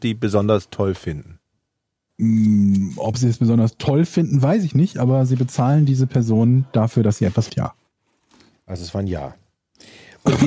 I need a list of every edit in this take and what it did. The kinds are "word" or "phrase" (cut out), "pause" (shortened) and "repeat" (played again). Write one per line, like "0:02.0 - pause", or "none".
0:07.5 - word